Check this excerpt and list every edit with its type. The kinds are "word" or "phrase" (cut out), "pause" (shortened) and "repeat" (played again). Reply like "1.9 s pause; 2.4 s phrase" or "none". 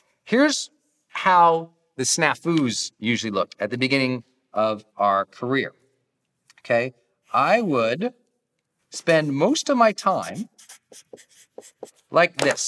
none